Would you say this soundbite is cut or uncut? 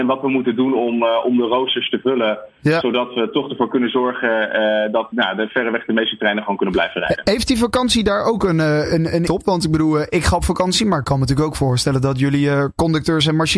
cut